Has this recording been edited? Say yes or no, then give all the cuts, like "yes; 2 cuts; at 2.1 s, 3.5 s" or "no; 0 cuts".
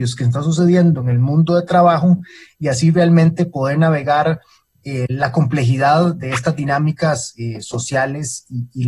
no; 0 cuts